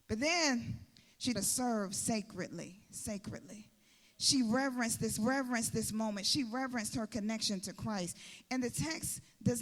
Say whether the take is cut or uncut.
cut